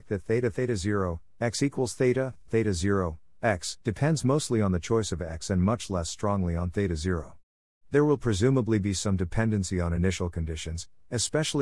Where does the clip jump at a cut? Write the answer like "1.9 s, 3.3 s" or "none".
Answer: 3.8 s